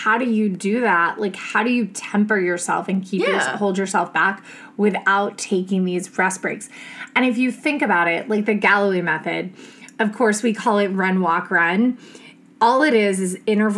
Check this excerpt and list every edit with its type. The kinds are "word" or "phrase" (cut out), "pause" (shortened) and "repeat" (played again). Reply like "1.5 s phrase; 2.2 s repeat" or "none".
none